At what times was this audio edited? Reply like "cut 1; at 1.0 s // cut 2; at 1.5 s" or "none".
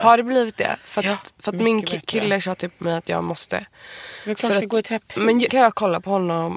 cut 1; at 5.5 s